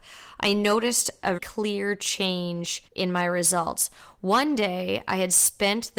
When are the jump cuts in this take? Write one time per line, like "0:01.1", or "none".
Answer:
0:01.4
0:02.9

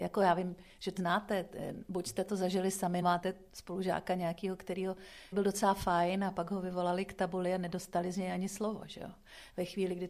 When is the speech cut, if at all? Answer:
0:01.0
0:03.0
0:05.3

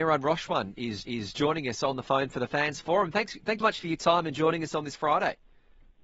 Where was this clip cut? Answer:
0:01.0
0:03.6

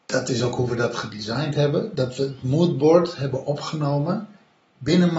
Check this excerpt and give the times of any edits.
none

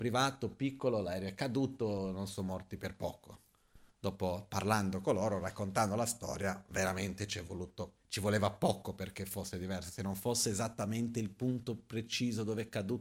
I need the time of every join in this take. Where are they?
0:08.0

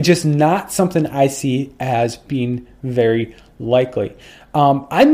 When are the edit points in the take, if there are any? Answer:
none

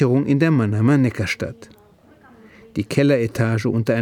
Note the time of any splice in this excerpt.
none

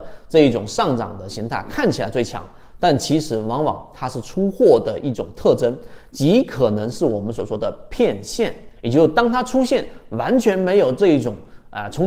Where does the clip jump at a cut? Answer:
0:08.8

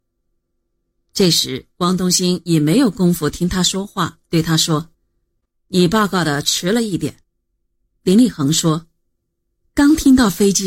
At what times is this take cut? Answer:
0:04.2
0:04.9
0:07.2

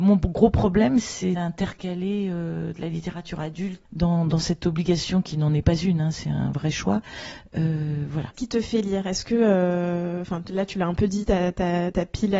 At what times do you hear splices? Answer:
0:01.4
0:03.9
0:08.3

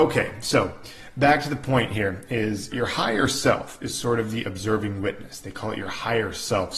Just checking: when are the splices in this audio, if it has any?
0:02.7

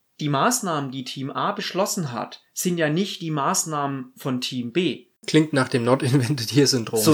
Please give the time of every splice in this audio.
none

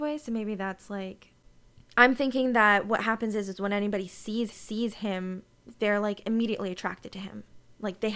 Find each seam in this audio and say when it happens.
0:04.5

